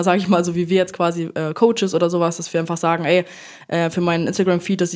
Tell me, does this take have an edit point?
no; 0 cuts

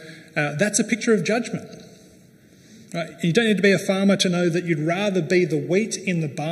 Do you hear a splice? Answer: no; 0 cuts

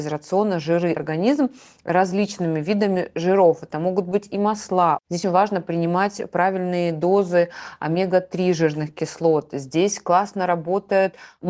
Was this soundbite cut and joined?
yes; 2 cuts; at 1.0 s, 5.2 s

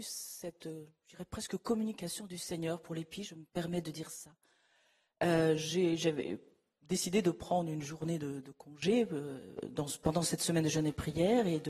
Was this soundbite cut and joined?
no; 0 cuts

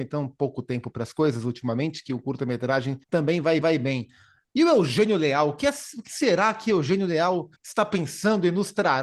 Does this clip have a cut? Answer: yes; 3 cuts; at 3.0 s, 3.6 s, 7.6 s

